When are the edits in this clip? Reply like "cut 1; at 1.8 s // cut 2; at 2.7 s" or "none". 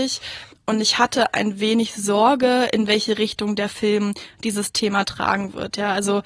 none